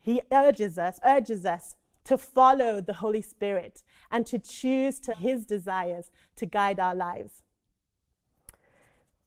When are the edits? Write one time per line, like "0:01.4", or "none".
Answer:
0:01.0
0:05.1